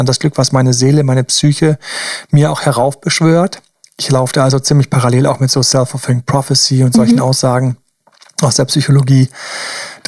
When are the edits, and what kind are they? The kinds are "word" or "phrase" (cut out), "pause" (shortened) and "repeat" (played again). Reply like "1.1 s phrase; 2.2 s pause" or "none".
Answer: none

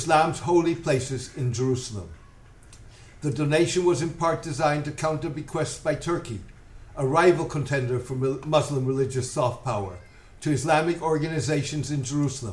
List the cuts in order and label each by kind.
none

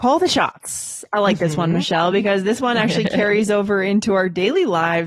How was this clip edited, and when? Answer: none

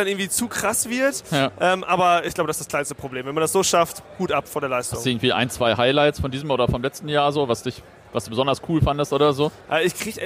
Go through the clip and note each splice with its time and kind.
none

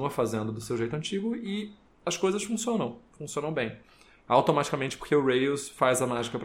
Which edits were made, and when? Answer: none

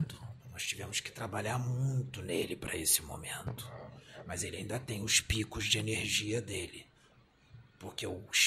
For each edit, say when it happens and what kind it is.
none

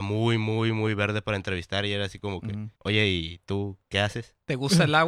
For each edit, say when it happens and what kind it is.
2.8 s pause

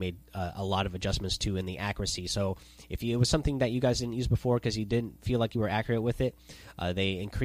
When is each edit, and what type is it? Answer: none

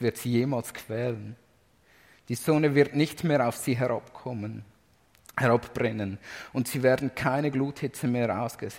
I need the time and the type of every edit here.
none

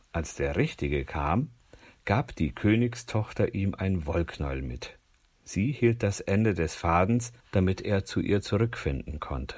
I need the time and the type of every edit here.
7.4 s pause

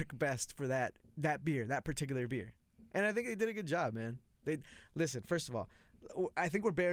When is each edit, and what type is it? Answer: 1.0 s pause

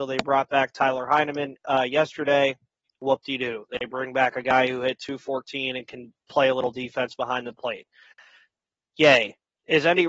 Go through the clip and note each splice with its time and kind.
none

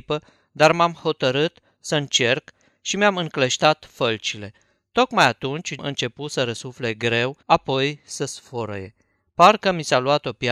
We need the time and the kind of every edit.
5.8 s word; 7.4 s pause

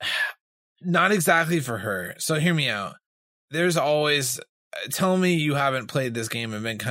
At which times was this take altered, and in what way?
3.3 s pause

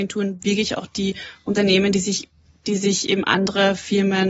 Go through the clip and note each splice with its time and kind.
none

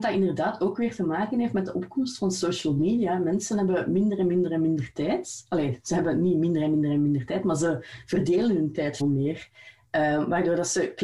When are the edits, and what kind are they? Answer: 9.0 s word

